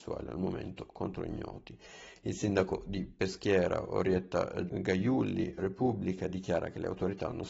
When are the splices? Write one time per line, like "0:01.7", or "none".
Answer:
0:04.7
0:05.6

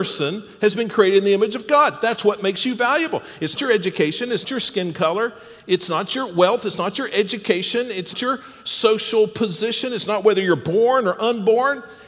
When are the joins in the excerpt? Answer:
0:03.6
0:04.4
0:08.1

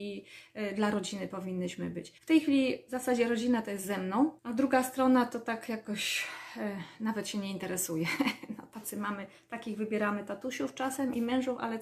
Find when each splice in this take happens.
0:02.2
0:04.4

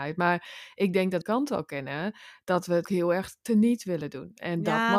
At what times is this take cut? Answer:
0:01.2
0:02.8

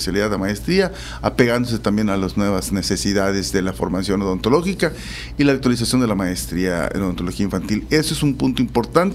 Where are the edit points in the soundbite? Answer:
none

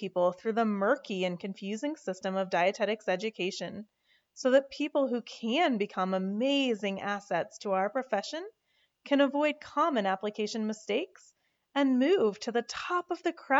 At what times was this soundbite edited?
none

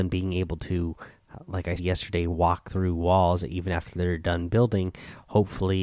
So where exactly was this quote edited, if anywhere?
0:01.8

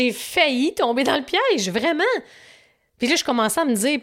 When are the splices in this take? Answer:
none

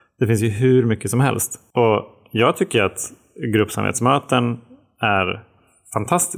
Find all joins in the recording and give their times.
none

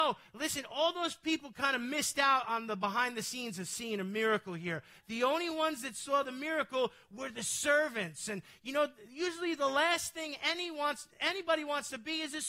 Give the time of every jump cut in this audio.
none

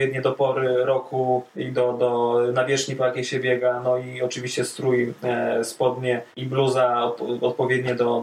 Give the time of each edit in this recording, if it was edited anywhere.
0:01.5
0:06.3

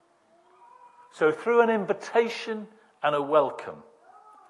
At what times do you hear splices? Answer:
none

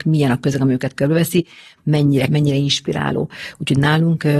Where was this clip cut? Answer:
0:02.3

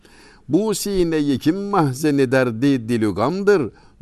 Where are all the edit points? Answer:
none

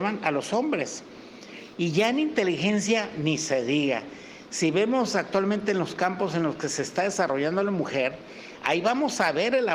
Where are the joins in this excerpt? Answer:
none

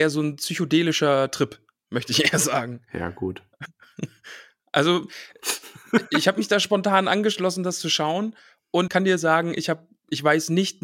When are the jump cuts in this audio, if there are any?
0:08.9

